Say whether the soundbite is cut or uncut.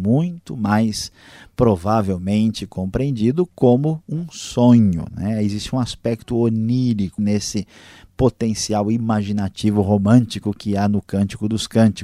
cut